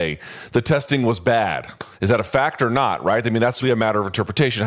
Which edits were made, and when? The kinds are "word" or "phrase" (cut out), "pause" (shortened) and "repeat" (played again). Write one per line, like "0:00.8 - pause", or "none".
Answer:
0:01.9 - pause
0:03.6 - word